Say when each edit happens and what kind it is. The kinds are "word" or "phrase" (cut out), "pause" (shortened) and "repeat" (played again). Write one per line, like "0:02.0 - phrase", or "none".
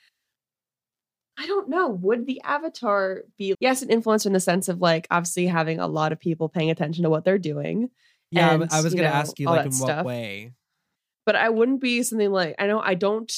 0:03.5 - word